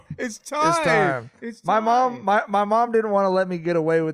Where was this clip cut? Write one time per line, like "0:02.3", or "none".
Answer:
none